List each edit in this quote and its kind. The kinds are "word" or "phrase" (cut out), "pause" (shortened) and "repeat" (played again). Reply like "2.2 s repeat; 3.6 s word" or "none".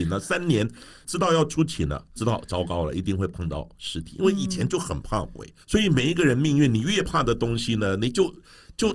5.6 s pause